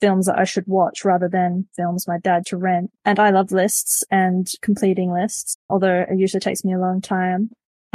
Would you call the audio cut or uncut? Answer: cut